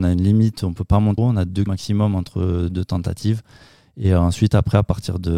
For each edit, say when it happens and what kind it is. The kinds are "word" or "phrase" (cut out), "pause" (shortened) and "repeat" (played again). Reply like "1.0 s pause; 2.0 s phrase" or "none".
1.2 s phrase; 1.7 s word

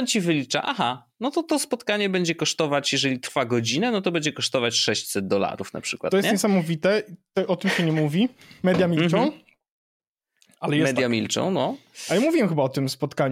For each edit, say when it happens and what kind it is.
none

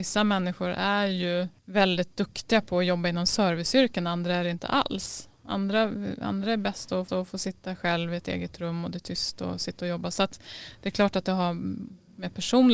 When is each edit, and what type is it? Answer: 1.6 s pause; 7.1 s repeat

